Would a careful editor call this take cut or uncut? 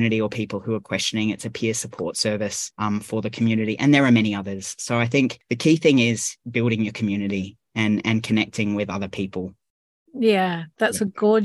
uncut